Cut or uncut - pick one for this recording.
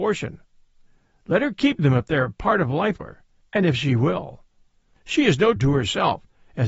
cut